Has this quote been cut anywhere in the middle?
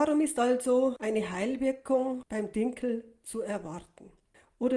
no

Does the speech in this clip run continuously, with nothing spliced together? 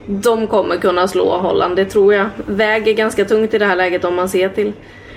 yes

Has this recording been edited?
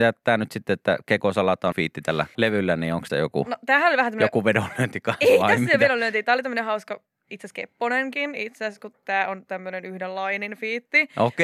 yes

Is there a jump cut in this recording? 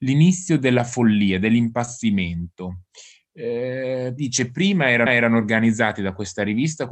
yes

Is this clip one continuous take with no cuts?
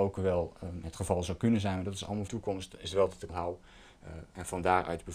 no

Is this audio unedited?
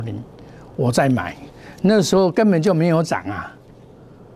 yes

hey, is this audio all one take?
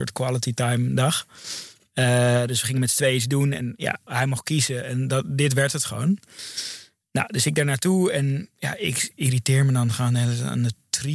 no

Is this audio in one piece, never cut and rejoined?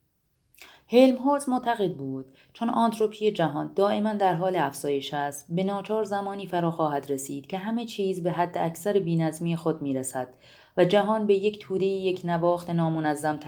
yes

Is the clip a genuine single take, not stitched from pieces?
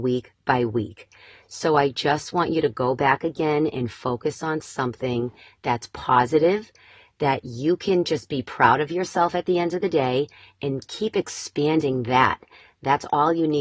yes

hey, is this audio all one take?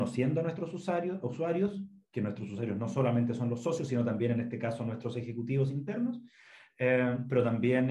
yes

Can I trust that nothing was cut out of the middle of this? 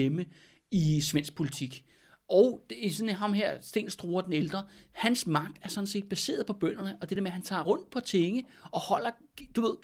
yes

